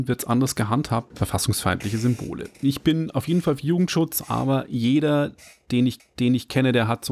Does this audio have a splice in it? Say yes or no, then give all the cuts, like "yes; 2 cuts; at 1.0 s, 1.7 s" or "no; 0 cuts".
yes; 2 cuts; at 1.1 s, 6.0 s